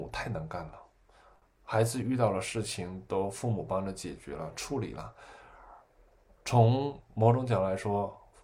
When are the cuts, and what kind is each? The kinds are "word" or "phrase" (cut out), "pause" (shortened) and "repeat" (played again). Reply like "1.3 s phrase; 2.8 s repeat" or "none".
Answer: none